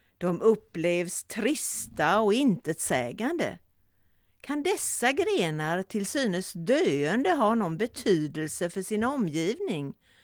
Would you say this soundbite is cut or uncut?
uncut